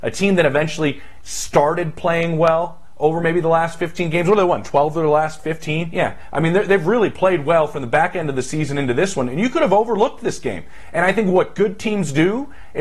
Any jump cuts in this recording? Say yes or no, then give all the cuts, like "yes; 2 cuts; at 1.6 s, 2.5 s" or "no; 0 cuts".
no; 0 cuts